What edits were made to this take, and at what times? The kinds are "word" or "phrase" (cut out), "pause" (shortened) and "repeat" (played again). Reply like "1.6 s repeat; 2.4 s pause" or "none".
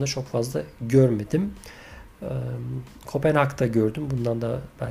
none

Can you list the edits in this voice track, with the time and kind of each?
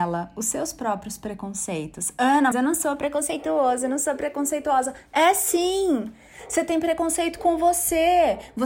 2.5 s word

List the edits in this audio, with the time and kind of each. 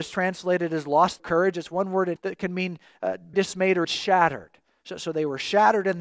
1.2 s word; 2.2 s word; 3.3 s word; 3.8 s word

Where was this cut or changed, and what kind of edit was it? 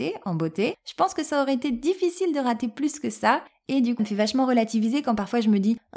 4.0 s word

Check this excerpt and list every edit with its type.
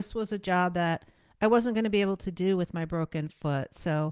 none

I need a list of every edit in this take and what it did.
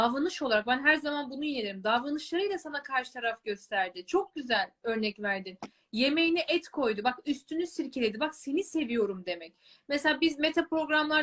none

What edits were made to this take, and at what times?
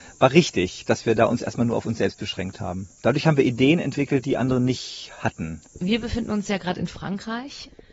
2.9 s pause; 5.7 s pause

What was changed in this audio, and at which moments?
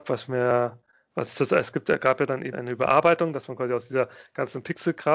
2.5 s word

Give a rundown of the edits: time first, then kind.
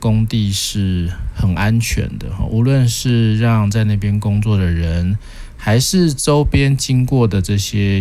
none

